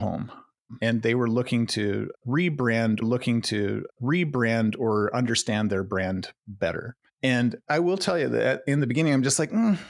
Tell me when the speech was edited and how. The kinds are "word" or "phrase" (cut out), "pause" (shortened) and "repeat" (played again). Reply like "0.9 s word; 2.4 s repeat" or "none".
3.0 s repeat